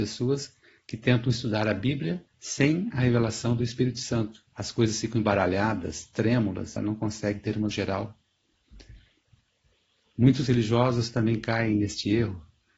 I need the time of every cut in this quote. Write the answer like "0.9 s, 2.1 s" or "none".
2.3 s, 4.5 s, 6.8 s, 7.7 s, 10.5 s